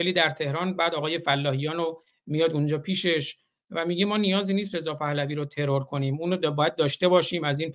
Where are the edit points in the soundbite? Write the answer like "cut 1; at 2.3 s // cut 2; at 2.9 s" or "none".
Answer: none